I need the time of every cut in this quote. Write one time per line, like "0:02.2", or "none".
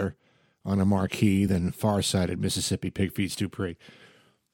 none